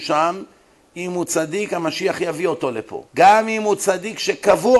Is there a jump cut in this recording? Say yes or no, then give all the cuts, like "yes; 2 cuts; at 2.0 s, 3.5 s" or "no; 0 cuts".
yes; 1 cut; at 3.1 s